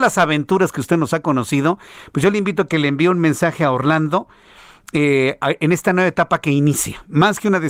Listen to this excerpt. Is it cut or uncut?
uncut